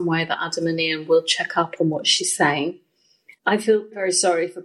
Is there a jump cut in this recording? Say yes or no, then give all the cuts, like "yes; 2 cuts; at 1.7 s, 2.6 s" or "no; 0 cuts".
no; 0 cuts